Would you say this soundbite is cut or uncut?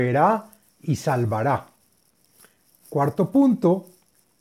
uncut